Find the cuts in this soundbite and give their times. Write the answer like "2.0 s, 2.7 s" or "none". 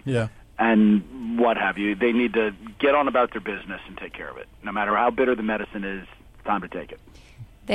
none